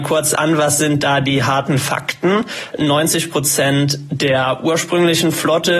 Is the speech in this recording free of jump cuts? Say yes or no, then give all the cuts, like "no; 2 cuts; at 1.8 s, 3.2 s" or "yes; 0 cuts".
yes; 0 cuts